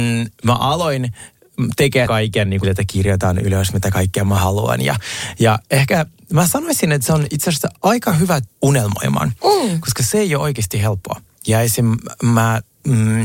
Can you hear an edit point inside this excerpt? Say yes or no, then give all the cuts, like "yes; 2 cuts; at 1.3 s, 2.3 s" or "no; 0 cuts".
yes; 4 cuts; at 2.1 s, 2.6 s, 7.8 s, 8.5 s